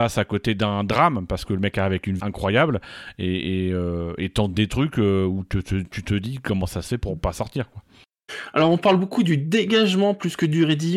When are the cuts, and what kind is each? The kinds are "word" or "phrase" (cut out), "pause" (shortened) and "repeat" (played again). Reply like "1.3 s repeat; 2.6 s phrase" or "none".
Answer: 2.2 s word

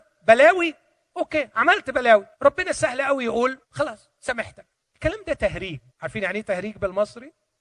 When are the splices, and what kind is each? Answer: 2.3 s pause; 3.6 s pause; 4.7 s pause; 5.9 s pause

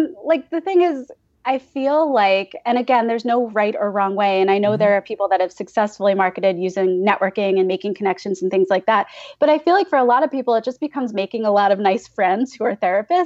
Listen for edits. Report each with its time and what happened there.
none

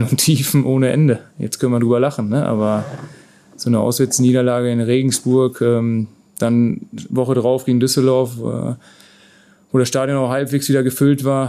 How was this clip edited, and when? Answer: none

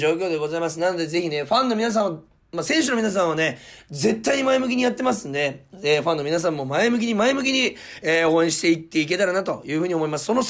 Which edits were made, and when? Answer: none

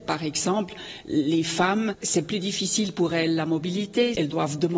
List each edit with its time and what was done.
none

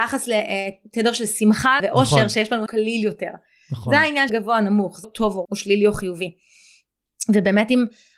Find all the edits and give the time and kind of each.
1.8 s word; 2.7 s word; 4.3 s word; 5.0 s word; 5.4 s word

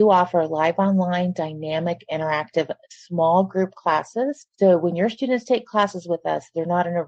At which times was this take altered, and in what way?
4.5 s pause

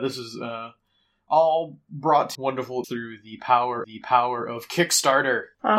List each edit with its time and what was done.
2.3 s word; 2.8 s word; 3.8 s repeat

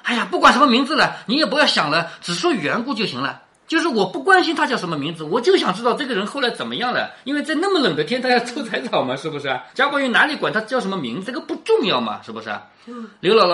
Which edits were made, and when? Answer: 9.7 s pause; 11.3 s word

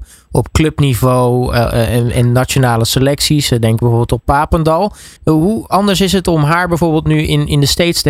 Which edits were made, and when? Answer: 5.2 s pause

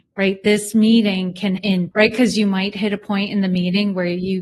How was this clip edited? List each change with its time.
1.6 s word; 1.9 s word

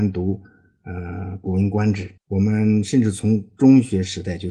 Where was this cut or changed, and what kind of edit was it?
2.2 s pause

